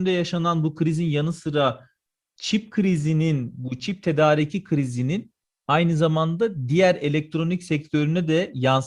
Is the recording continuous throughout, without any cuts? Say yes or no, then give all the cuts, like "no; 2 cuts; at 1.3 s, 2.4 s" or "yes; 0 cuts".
yes; 0 cuts